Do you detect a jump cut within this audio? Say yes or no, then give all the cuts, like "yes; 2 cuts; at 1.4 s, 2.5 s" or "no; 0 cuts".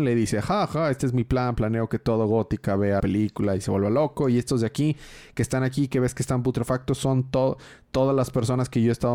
yes; 1 cut; at 3.0 s